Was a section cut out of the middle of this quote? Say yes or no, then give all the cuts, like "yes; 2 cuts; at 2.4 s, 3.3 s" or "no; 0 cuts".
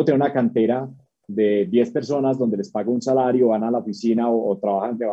no; 0 cuts